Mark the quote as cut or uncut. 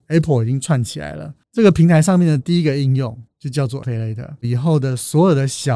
cut